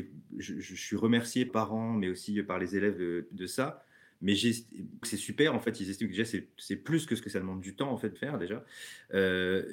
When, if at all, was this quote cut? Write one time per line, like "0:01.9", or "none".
0:01.5
0:05.0
0:07.2
0:08.2